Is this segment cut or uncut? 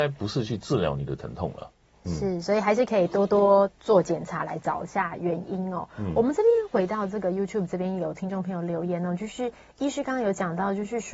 uncut